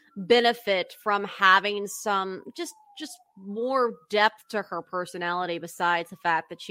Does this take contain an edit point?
no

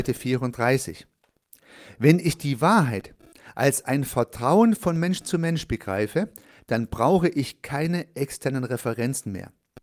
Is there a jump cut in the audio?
no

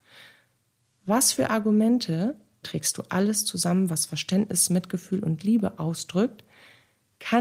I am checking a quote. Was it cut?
yes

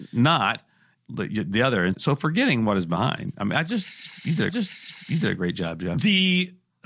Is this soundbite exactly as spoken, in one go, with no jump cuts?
no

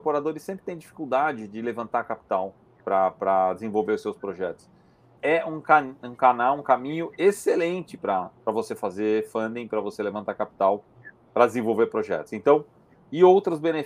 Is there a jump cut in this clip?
yes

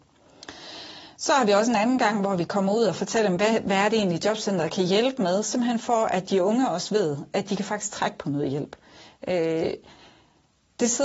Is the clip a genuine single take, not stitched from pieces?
yes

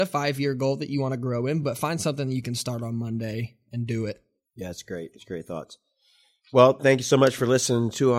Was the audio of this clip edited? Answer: no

